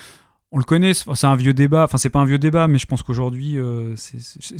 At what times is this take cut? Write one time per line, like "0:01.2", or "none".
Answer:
none

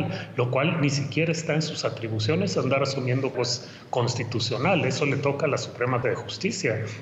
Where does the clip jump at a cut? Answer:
0:03.3
0:06.0

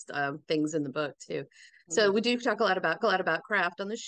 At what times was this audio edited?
0:03.0

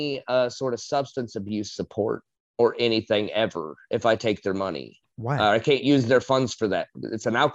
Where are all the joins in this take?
none

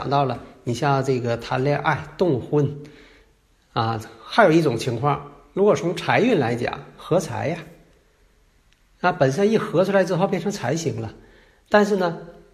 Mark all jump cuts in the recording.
none

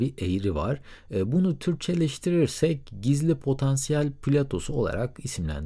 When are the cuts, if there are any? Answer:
none

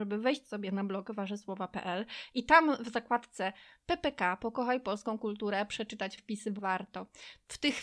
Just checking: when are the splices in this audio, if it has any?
0:06.2
0:06.6

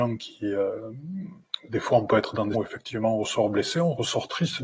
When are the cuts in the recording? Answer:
0:02.5

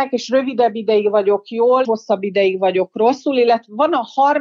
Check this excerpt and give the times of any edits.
0:01.8

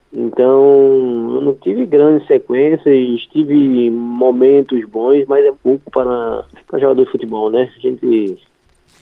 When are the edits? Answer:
0:05.5
0:06.5

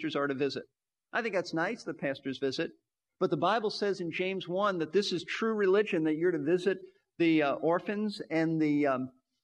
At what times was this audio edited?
none

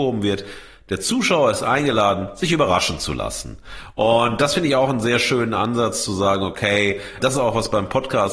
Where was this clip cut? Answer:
0:07.2

